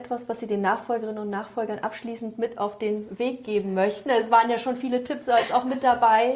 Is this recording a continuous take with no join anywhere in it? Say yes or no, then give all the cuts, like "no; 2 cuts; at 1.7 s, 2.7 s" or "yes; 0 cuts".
yes; 0 cuts